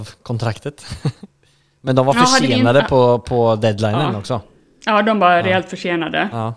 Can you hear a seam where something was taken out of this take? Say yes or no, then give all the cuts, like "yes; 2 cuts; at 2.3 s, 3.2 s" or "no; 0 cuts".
no; 0 cuts